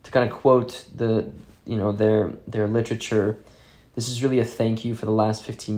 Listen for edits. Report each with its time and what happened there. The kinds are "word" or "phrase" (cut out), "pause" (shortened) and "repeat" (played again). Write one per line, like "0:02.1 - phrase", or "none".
none